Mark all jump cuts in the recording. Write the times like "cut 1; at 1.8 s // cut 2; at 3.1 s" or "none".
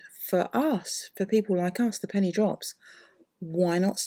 none